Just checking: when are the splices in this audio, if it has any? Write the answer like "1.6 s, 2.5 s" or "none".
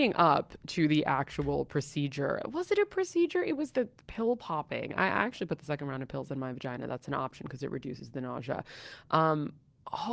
3.7 s